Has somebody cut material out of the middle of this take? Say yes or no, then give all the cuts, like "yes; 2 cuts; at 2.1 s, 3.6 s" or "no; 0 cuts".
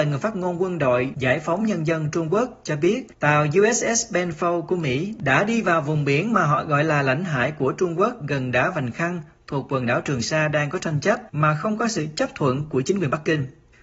yes; 1 cut; at 11.3 s